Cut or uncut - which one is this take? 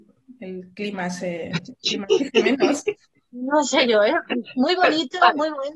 uncut